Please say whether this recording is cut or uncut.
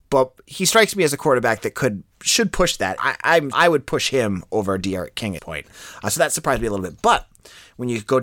cut